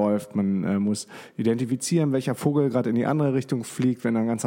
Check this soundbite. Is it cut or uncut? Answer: uncut